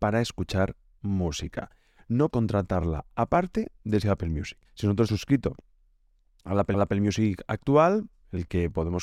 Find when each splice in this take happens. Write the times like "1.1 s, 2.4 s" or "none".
2.3 s, 4.0 s, 4.6 s, 5.1 s, 6.7 s